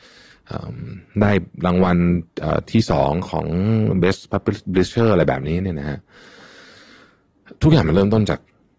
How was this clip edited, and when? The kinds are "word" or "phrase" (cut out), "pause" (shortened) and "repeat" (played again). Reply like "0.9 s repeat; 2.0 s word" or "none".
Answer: none